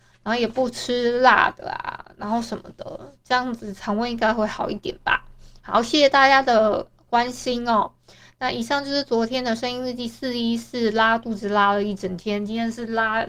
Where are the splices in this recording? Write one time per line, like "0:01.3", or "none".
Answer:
none